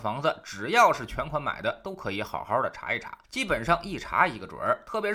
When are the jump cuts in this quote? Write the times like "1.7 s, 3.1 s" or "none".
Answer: 3.2 s